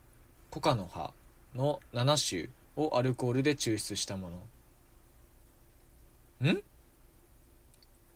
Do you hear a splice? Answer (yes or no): yes